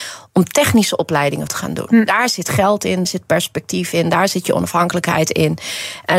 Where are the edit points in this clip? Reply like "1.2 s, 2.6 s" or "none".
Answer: 1.5 s, 3.0 s